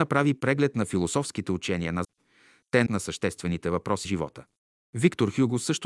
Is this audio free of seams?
no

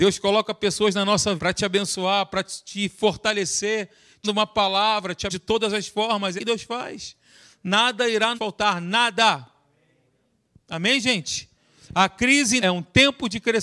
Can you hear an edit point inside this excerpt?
yes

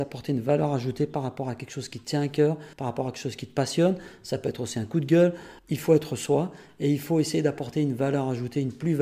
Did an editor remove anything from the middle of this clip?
yes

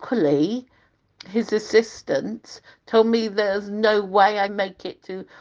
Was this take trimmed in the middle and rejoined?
yes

